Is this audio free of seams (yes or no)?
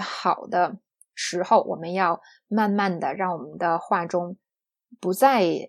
yes